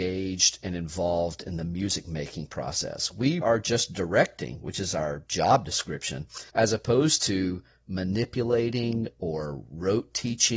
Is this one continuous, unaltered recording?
no; 3 cuts; at 3.4 s, 5.3 s, 6.5 s

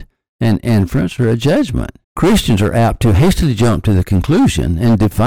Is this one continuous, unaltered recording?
no; 1 cut; at 2.0 s

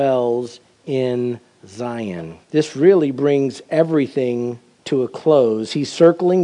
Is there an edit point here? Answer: yes; 1 cut; at 2.4 s

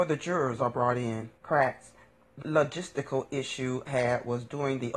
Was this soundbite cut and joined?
yes; 3 cuts; at 1.4 s, 2.4 s, 3.9 s

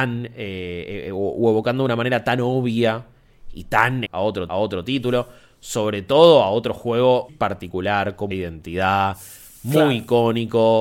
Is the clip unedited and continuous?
no; 4 cuts; at 4.1 s, 4.5 s, 7.3 s, 8.3 s

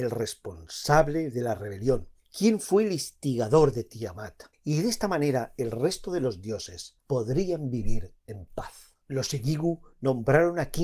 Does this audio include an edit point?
yes; 4 cuts; at 2.2 s, 4.5 s, 7.0 s, 9.0 s

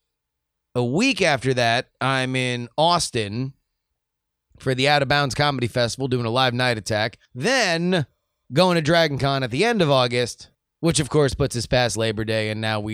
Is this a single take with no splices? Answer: no; 2 cuts; at 7.3 s, 10.5 s

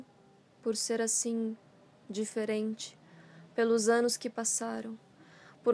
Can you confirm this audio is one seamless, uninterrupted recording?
yes; 0 cuts

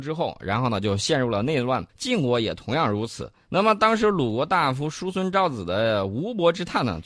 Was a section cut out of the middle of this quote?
yes; 2 cuts; at 1.9 s, 3.4 s

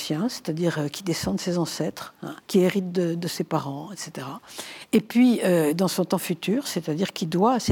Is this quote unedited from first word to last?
no; 1 cut; at 2.4 s

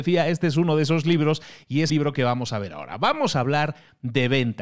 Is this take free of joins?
no; 1 cut; at 1.9 s

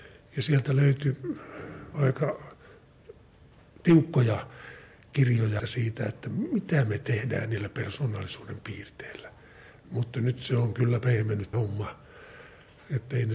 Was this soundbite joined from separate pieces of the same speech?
yes; 3 cuts; at 1.9 s, 5.6 s, 11.5 s

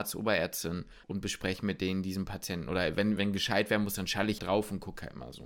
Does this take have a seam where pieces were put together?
yes; 3 cuts; at 1.0 s, 3.2 s, 4.4 s

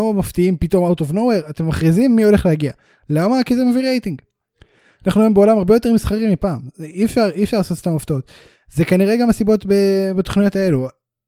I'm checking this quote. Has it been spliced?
no; 0 cuts

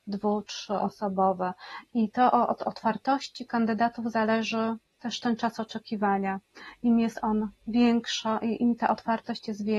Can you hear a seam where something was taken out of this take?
yes; 1 cut; at 4.9 s

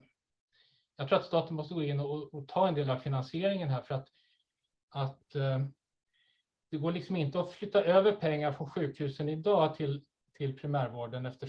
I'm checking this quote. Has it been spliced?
no; 0 cuts

